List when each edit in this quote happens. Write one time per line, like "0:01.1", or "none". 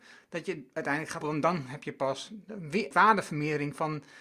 0:01.2
0:02.9